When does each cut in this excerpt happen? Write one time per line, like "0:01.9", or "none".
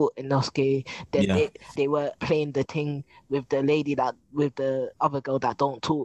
0:01.8
0:02.2
0:02.7
0:04.9